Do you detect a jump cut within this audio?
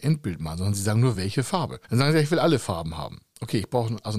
no; 0 cuts

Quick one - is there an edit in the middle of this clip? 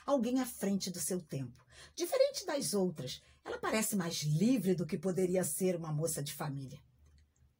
no; 0 cuts

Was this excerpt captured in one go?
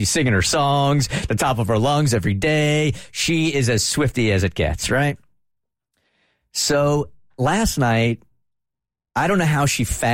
yes; 0 cuts

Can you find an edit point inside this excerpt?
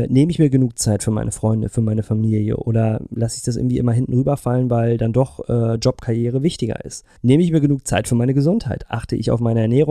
yes; 1 cut; at 7.2 s

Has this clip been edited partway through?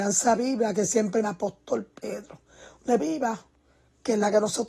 yes; 2 cuts; at 1.2 s, 3.0 s

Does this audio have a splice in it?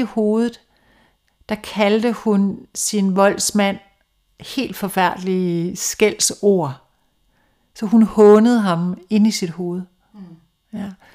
no; 0 cuts

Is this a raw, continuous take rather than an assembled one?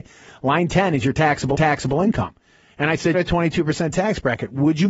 no; 2 cuts; at 1.5 s, 3.1 s

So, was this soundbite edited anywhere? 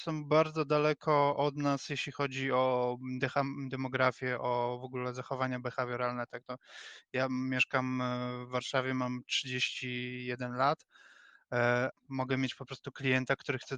yes; 1 cut; at 11.9 s

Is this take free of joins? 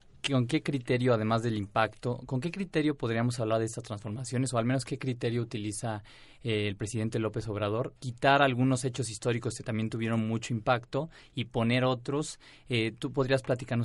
no; 1 cut; at 8.0 s

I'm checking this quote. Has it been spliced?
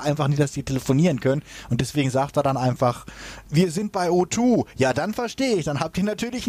yes; 1 cut; at 3.4 s

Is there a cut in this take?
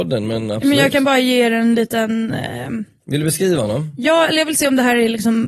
no; 0 cuts

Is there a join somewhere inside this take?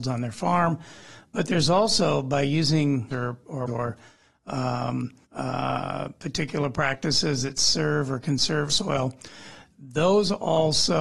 yes; 4 cuts; at 3.1 s, 3.7 s, 5.2 s, 8.7 s

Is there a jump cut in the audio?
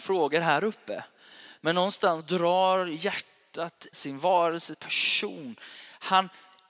yes; 3 cuts; at 2.2 s, 3.9 s, 4.7 s

